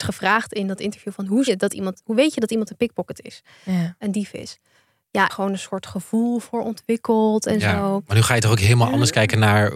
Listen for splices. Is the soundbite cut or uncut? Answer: cut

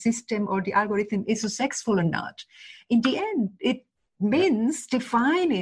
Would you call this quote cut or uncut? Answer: uncut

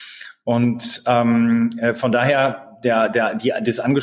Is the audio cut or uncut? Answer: uncut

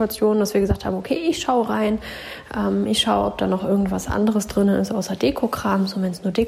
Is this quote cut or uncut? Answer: uncut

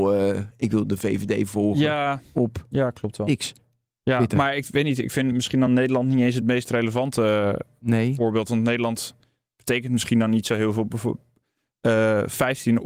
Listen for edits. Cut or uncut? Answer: uncut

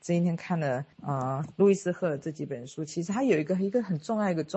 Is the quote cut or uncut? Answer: cut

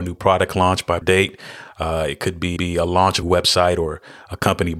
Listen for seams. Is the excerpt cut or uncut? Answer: cut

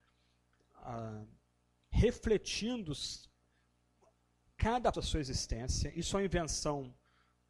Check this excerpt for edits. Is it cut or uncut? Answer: cut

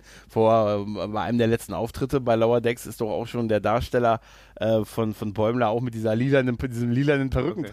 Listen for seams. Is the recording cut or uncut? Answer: uncut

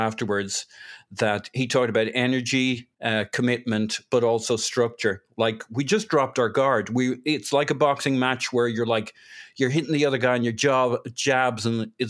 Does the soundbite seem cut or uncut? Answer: cut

